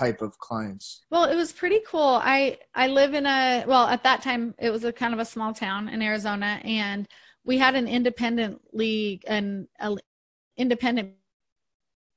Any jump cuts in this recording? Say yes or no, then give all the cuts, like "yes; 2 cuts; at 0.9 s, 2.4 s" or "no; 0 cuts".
yes; 1 cut; at 1.0 s